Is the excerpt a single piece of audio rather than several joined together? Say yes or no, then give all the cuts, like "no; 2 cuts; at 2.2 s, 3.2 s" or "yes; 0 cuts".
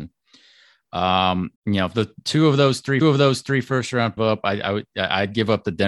no; 3 cuts; at 1.6 s, 3.0 s, 4.2 s